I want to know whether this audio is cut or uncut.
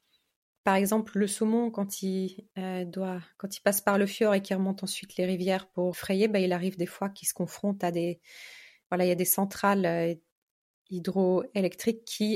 cut